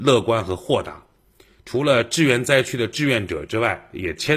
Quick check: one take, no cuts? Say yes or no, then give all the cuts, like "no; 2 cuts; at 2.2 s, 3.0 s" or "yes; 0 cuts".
yes; 0 cuts